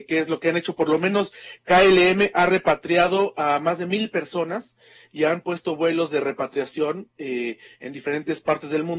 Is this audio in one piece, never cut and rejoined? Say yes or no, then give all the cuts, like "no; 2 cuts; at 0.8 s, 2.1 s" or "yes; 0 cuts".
yes; 0 cuts